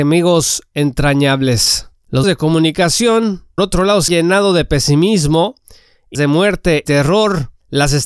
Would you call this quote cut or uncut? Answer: cut